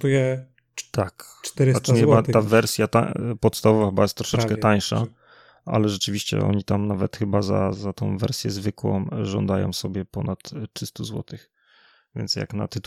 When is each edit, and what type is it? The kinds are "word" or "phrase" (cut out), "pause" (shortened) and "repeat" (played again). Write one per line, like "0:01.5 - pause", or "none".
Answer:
0:07.7 - word